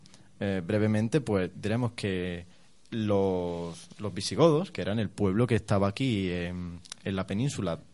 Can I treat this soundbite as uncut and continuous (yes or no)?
yes